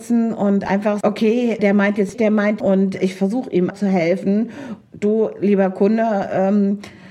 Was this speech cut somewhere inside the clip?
yes; 7 cuts; at 1.0 s, 1.6 s, 2.1 s, 2.6 s, 3.0 s, 3.7 s, 4.8 s

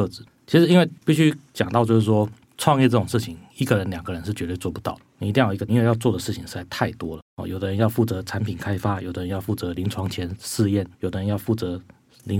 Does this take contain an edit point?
yes; 4 cuts; at 1.0 s, 5.7 s, 7.3 s, 10.9 s

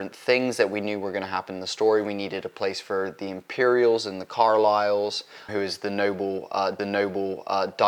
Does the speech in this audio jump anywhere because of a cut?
yes; 2 cuts; at 5.5 s, 6.8 s

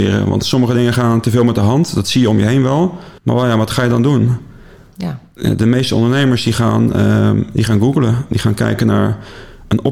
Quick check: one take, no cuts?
no; 1 cut; at 3.2 s

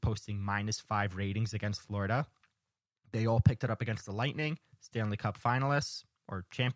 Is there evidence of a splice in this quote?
no; 0 cuts

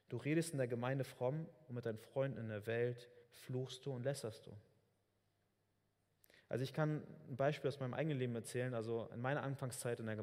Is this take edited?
yes; 1 cut; at 3.2 s

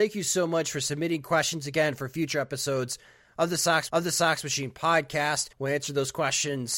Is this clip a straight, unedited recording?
no; 2 cuts; at 3.9 s, 5.5 s

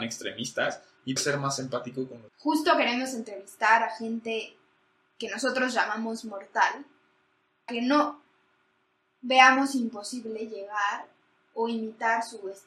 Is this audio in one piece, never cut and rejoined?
no; 3 cuts; at 1.2 s, 2.3 s, 7.7 s

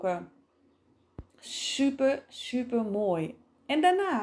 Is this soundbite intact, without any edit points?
no; 1 cut; at 1.3 s

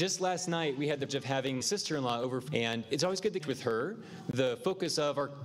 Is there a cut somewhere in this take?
yes; 5 cuts; at 1.1 s, 1.6 s, 2.5 s, 2.8 s, 3.4 s

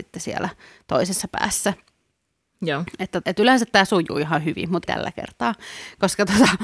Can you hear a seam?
yes; 2 cuts; at 3.2 s, 4.9 s

